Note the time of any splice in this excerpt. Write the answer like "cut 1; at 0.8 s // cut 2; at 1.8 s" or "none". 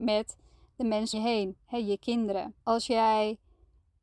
cut 1; at 1.1 s // cut 2; at 2.6 s